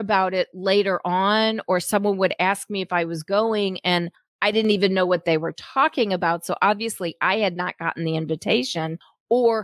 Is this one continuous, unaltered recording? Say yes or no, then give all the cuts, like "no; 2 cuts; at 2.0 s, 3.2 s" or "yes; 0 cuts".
yes; 0 cuts